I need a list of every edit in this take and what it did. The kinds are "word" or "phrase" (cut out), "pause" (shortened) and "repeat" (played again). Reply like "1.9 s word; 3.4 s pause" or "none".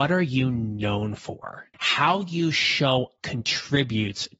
1.7 s pause; 3.2 s word